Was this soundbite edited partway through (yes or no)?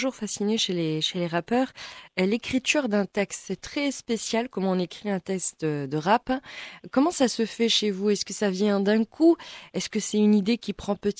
no